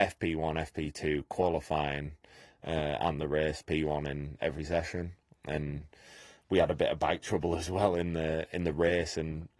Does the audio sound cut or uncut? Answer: uncut